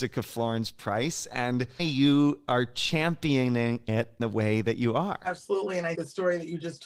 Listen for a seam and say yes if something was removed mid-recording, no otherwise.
yes